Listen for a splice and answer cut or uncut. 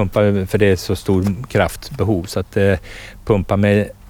uncut